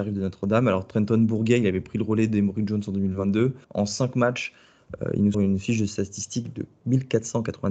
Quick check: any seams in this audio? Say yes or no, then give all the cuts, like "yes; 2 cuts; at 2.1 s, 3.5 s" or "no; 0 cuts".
yes; 2 cuts; at 3.6 s, 5.3 s